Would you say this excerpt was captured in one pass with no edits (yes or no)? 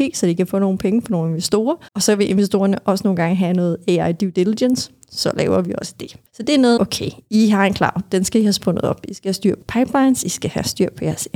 no